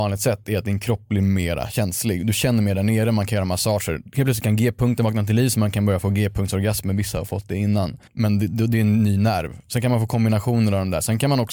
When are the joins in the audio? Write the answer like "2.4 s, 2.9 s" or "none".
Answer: 8.1 s